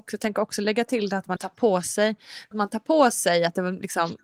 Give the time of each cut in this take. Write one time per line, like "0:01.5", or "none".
0:01.4
0:02.5